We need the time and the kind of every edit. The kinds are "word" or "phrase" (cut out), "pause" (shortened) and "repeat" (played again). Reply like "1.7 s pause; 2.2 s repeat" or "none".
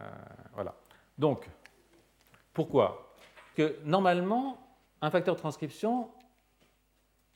3.5 s word; 4.9 s pause

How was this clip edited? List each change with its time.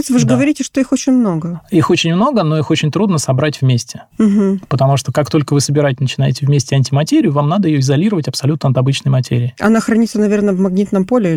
none

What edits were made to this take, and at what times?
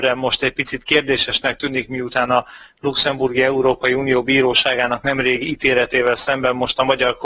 none

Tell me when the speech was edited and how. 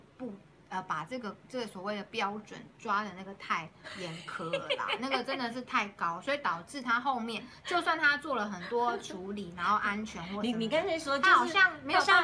1.4 s pause

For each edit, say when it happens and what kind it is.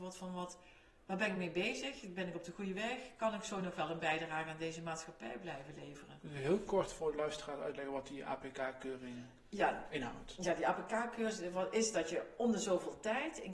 none

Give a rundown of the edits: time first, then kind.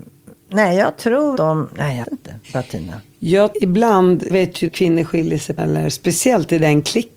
1.3 s word; 2.0 s word; 2.4 s pause; 3.5 s word; 4.3 s word; 4.7 s word; 5.6 s word

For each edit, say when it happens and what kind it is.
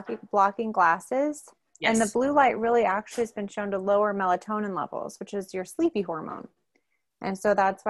none

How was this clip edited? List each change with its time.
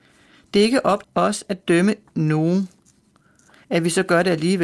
1.0 s word

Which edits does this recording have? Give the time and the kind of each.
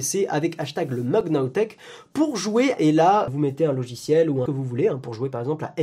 2.8 s word; 3.3 s word; 4.5 s phrase

